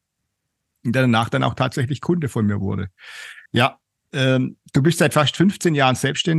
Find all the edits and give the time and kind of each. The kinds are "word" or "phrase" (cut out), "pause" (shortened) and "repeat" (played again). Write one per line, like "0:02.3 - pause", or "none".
0:03.5 - pause